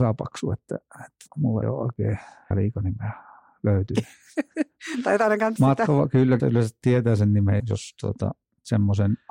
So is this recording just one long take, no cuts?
no; 6 cuts; at 1.3 s, 1.6 s, 2.5 s, 5.6 s, 6.4 s, 7.6 s

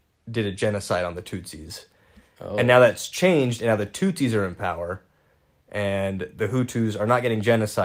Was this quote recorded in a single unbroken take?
yes; 0 cuts

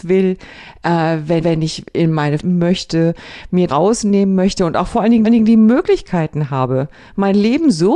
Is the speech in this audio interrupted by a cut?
yes; 4 cuts; at 1.4 s, 2.4 s, 3.7 s, 5.2 s

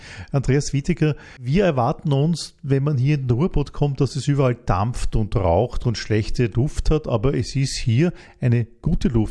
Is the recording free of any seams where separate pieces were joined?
yes; 0 cuts

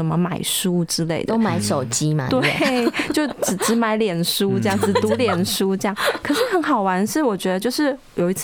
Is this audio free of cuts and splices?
yes; 0 cuts

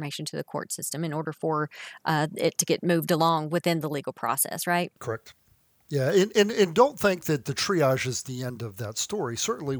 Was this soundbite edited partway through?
yes; 1 cut; at 5.0 s

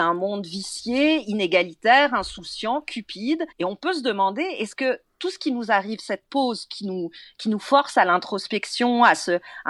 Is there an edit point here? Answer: yes; 1 cut; at 3.5 s

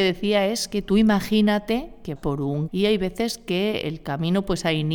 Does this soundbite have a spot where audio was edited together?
yes; 2 cuts; at 2.2 s, 2.7 s

